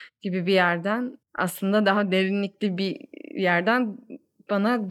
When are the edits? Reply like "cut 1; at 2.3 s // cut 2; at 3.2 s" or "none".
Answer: cut 1; at 1.2 s